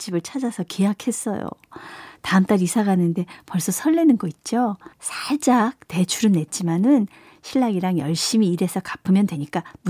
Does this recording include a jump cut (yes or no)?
yes